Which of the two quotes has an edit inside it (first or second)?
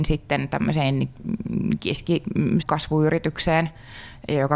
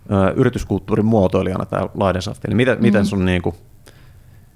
first